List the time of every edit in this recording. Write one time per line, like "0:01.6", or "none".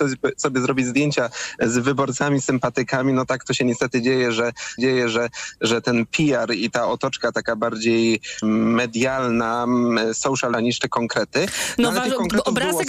0:04.8
0:08.4
0:10.5